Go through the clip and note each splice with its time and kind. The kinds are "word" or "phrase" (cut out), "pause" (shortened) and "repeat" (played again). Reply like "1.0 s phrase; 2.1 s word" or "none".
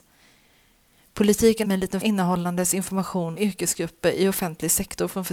1.6 s word; 2.0 s word; 3.4 s word